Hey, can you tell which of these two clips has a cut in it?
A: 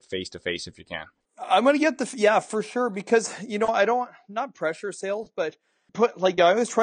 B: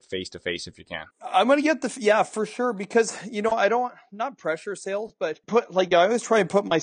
B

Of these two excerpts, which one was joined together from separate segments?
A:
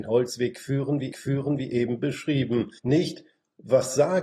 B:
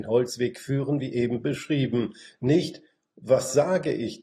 A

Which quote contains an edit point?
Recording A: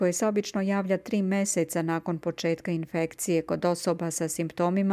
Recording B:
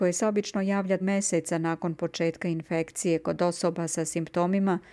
B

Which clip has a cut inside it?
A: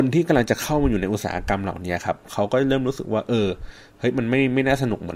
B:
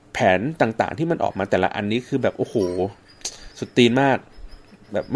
B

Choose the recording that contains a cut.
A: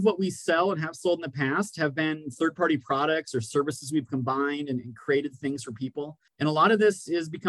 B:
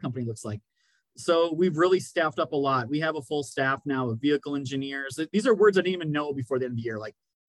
A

